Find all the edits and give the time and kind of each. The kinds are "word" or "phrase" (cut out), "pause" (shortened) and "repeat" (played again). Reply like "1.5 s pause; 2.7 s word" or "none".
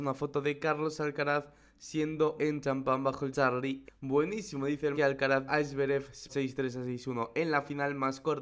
2.4 s word; 3.3 s word; 3.9 s word; 4.9 s word; 5.5 s word; 6.3 s word

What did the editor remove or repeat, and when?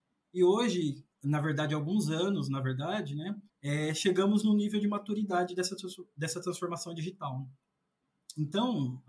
1.1 s pause; 3.5 s pause

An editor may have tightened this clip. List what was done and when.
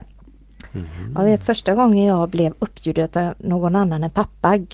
none

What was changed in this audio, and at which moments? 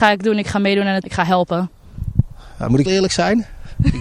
1.0 s word; 2.9 s word

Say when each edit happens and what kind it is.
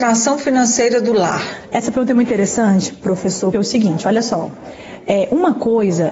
3.5 s word

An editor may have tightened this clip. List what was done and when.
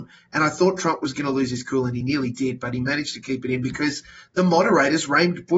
none

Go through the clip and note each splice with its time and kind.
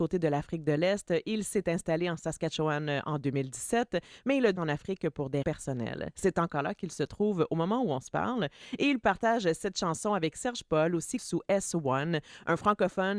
4.6 s word; 5.4 s word; 11.2 s word

